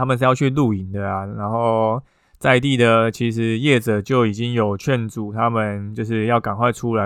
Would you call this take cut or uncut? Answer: uncut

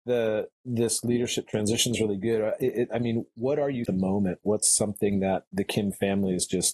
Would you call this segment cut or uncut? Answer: cut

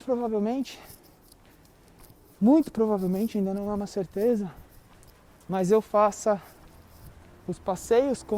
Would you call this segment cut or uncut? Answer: uncut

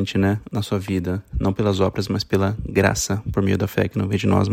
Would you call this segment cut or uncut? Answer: uncut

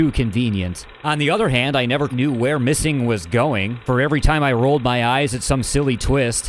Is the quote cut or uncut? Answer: cut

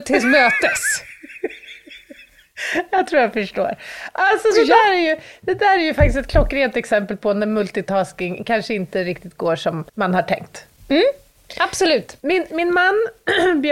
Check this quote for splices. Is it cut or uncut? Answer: cut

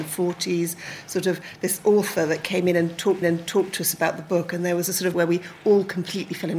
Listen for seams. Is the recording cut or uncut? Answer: cut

